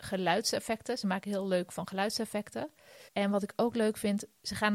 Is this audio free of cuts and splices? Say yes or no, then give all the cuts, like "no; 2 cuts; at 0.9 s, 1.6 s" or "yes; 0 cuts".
no; 2 cuts; at 1.7 s, 3.1 s